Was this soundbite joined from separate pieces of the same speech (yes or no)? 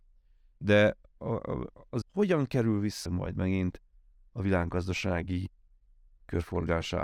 yes